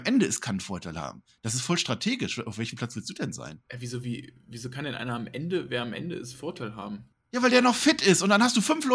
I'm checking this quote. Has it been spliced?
yes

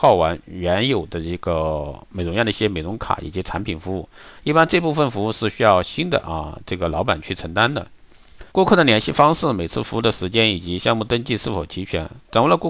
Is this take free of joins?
no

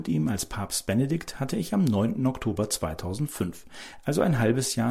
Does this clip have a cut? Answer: no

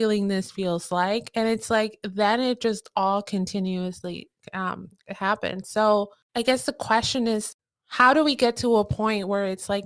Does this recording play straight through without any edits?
yes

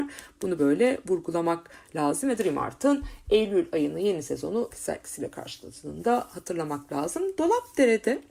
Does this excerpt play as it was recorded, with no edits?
no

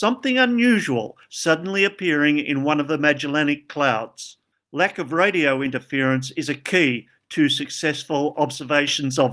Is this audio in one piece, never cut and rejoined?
yes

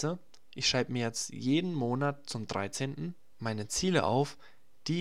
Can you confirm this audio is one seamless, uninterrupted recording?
yes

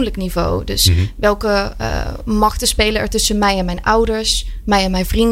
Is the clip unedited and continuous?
yes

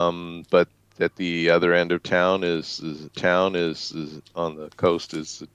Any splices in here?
yes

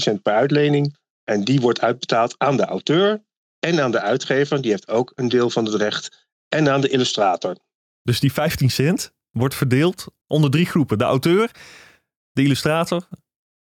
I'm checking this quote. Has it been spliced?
no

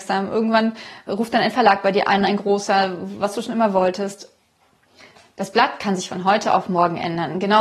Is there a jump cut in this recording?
no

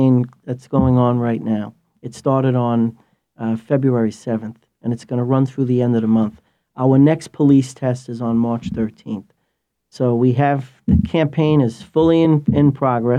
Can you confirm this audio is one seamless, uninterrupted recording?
yes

